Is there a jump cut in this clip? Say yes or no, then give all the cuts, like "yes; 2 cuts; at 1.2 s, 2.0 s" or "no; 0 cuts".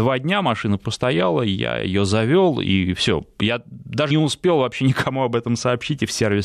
yes; 1 cut; at 4.1 s